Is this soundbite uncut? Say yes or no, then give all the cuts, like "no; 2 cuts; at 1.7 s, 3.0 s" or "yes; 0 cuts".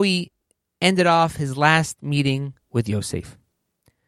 no; 1 cut; at 2.6 s